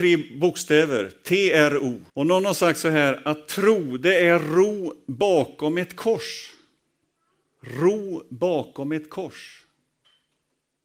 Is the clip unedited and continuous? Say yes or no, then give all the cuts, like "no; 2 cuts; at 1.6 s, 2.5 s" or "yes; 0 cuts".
no; 2 cuts; at 2.1 s, 7.2 s